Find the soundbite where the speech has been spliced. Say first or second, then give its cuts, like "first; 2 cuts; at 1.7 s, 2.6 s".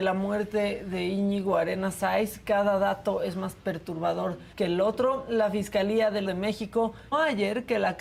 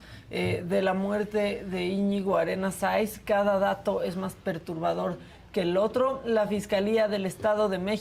first; 3 cuts; at 4.5 s, 6.3 s, 7.1 s